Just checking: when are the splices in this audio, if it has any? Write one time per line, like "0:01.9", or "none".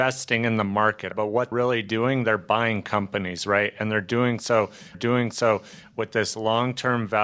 0:01.1
0:01.5
0:04.9